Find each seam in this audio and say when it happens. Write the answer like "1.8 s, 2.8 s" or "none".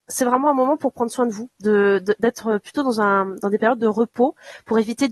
1.5 s